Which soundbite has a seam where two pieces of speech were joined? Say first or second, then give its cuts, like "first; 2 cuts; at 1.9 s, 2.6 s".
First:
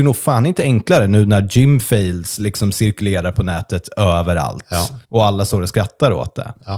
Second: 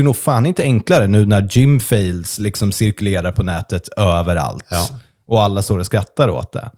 first; 1 cut; at 5.0 s